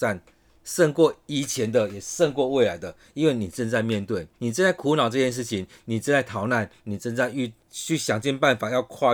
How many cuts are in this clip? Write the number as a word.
two